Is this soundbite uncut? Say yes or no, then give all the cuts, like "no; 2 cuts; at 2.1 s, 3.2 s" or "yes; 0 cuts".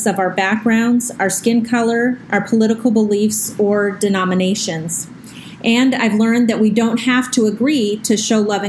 yes; 0 cuts